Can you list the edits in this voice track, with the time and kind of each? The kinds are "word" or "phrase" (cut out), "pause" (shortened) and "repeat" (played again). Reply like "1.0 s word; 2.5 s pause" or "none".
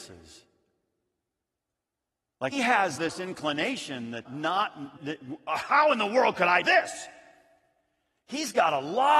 2.5 s word; 3.0 s word; 4.2 s word; 5.0 s word; 6.6 s word